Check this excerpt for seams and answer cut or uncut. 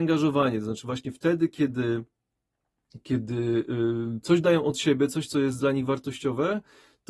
uncut